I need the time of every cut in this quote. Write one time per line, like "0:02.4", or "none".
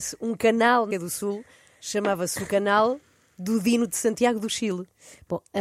0:00.9